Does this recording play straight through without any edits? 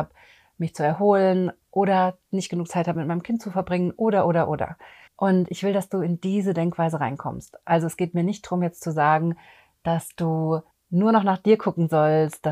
no; 3 cuts; at 1.6 s, 5.1 s, 10.7 s

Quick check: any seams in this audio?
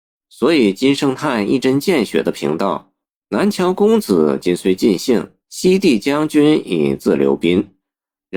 yes; 2 cuts; at 3.0 s, 5.4 s

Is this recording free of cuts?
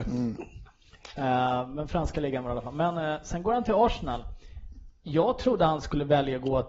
yes; 0 cuts

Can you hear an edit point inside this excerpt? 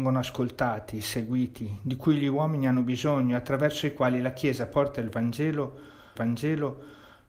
yes; 1 cut; at 6.2 s

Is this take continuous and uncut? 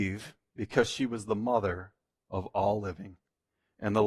yes; 0 cuts

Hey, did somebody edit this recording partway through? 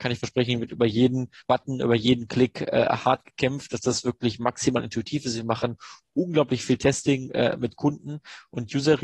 yes; 1 cut; at 1.4 s

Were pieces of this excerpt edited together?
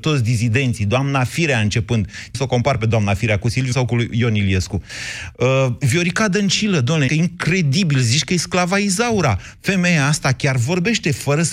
yes; 3 cuts; at 2.3 s, 3.7 s, 7.1 s

